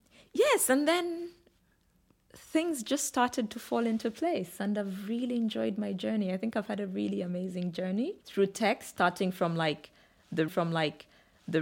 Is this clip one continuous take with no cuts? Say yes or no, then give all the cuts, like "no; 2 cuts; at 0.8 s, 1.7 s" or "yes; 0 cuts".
no; 2 cuts; at 8.2 s, 10.5 s